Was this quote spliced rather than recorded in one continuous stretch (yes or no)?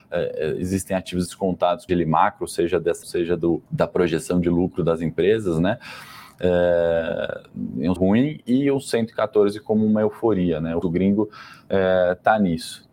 yes